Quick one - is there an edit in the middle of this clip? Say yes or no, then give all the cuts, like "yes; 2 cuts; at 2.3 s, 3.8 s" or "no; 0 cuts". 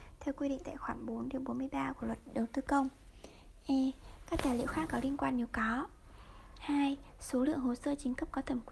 no; 0 cuts